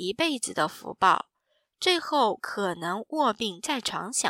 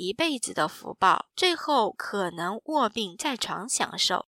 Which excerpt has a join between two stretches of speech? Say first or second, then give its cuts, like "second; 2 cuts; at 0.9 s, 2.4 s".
second; 1 cut; at 1.3 s